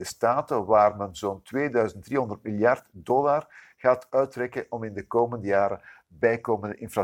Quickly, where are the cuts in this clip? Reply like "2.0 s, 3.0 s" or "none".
none